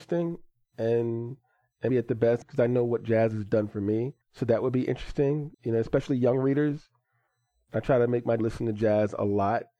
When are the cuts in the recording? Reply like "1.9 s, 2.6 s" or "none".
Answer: 1.9 s, 2.4 s, 4.2 s, 5.5 s, 8.4 s